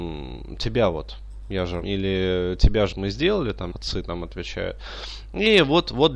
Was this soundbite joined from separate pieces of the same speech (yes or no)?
yes